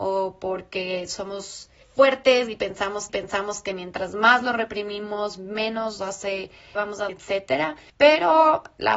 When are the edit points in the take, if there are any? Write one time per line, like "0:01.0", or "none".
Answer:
0:01.8
0:03.1
0:06.0
0:06.8
0:07.1
0:07.9